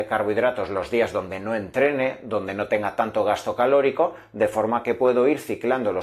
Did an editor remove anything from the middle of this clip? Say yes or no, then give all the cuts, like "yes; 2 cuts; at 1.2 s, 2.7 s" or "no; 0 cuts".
no; 0 cuts